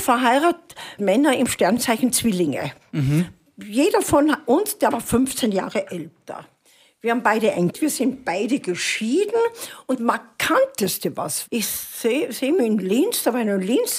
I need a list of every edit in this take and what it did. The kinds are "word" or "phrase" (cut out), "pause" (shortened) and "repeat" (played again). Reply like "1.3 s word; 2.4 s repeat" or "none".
1.0 s word; 4.9 s word; 7.7 s word; 10.0 s word; 11.5 s word; 12.6 s word